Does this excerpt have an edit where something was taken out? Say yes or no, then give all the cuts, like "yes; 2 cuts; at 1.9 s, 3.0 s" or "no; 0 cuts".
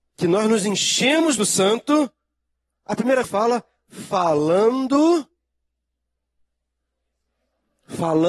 yes; 2 cuts; at 1.4 s, 3.2 s